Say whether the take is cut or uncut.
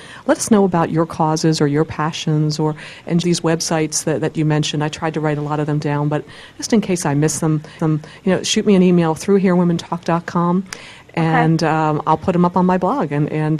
cut